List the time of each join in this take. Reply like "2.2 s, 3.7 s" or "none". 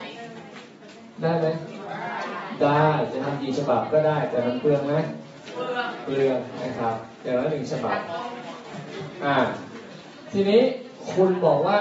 7.1 s